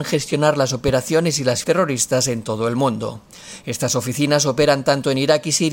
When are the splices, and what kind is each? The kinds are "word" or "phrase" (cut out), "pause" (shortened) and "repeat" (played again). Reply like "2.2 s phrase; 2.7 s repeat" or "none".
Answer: 1.6 s word